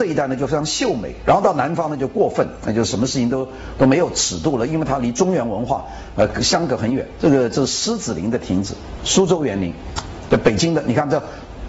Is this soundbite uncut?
no; 1 cut; at 9.0 s

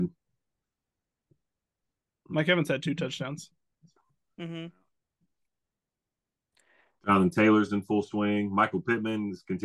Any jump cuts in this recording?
no; 0 cuts

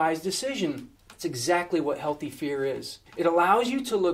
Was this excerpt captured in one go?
no; 2 cuts; at 1.0 s, 3.1 s

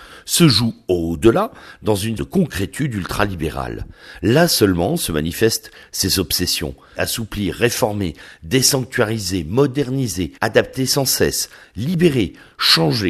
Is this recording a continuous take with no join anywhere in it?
no; 3 cuts; at 2.2 s, 7.0 s, 10.4 s

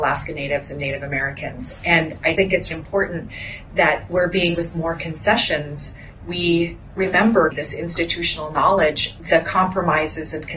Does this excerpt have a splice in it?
yes; 7 cuts; at 2.4 s, 2.7 s, 4.1 s, 4.5 s, 6.9 s, 7.5 s, 9.2 s

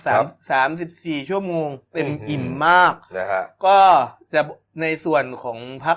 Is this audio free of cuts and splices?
yes; 0 cuts

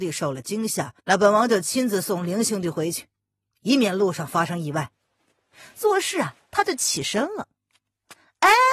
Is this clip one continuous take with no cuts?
no; 1 cut; at 1.0 s

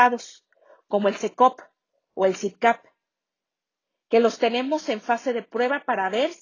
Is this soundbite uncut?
yes; 0 cuts

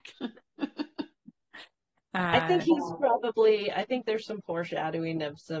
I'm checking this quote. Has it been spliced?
no; 0 cuts

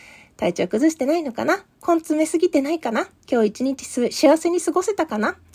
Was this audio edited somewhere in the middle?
yes; 2 cuts; at 1.7 s, 3.2 s

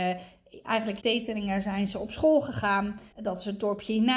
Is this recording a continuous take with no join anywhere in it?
no; 2 cuts; at 1.0 s, 3.1 s

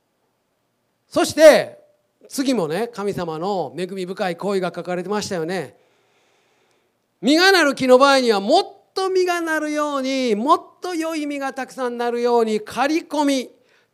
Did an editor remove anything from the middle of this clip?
no; 0 cuts

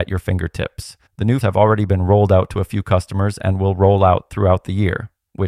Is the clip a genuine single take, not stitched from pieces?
no; 2 cuts; at 1.1 s, 1.4 s

